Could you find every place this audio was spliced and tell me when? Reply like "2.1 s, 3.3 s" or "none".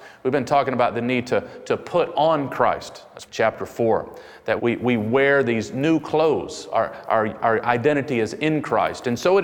3.3 s, 4.6 s